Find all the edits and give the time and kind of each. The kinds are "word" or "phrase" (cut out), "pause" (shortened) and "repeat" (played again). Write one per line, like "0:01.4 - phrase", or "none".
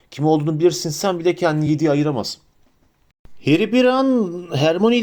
none